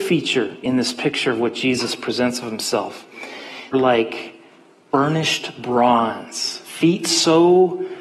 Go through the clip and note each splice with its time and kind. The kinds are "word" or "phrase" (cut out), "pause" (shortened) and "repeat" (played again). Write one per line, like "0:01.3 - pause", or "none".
0:03.7 - phrase